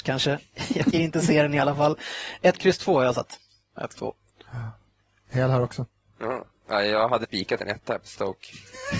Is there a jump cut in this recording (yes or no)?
yes